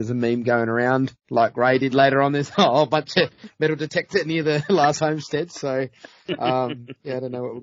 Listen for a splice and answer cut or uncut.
uncut